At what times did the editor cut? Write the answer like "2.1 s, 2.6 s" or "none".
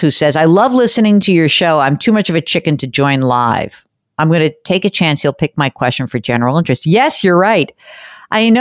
none